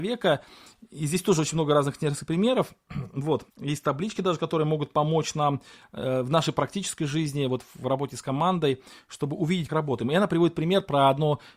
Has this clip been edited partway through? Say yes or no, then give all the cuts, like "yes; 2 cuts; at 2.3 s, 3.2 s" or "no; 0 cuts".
yes; 2 cuts; at 3.5 s, 9.7 s